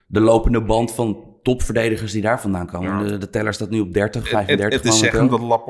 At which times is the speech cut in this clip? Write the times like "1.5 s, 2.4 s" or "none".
none